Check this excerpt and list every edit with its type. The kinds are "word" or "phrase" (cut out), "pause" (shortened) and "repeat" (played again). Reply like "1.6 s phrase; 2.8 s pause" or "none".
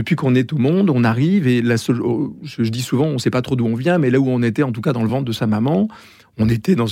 none